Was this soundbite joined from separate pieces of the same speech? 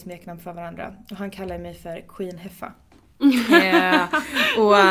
no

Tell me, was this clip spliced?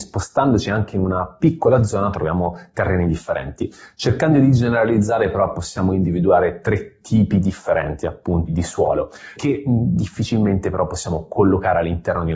yes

